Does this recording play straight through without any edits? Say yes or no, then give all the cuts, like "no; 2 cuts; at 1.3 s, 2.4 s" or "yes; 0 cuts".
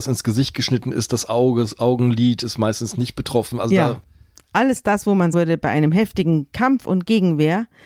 no; 1 cut; at 5.3 s